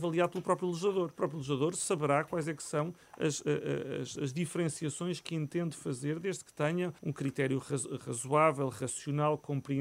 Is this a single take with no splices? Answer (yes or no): no